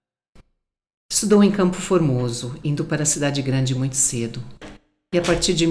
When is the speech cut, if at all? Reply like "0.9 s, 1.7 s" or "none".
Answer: none